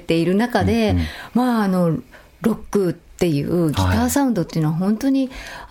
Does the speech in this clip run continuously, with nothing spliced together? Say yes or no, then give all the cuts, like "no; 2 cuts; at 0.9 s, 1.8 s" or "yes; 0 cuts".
yes; 0 cuts